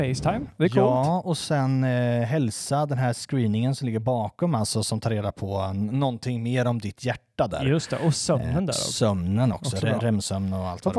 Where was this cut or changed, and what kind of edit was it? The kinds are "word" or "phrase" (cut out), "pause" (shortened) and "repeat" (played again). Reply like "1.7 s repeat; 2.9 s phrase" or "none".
none